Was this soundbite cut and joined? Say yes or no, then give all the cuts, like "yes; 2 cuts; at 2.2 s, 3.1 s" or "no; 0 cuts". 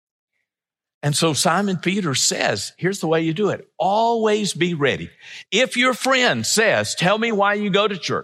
no; 0 cuts